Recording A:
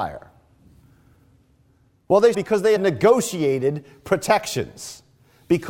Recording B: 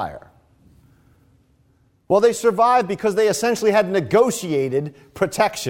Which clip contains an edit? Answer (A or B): A